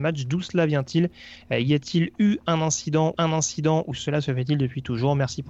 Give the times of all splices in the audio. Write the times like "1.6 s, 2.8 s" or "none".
3.1 s